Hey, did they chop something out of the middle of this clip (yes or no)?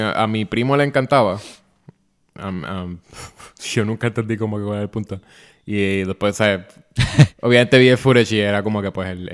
no